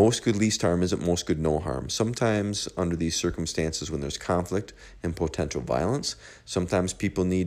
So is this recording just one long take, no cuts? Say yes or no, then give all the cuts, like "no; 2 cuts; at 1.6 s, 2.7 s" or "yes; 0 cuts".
yes; 0 cuts